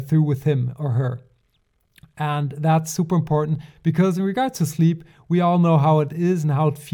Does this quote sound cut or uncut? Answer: uncut